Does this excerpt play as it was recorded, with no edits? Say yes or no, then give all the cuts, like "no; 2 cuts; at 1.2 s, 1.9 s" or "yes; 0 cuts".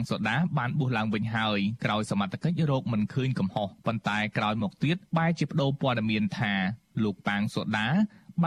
no; 2 cuts; at 3.8 s, 5.1 s